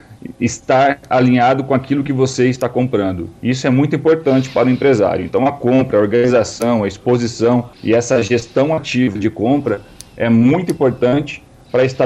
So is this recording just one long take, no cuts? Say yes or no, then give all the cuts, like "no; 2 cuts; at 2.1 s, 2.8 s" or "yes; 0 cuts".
no; 1 cut; at 7.7 s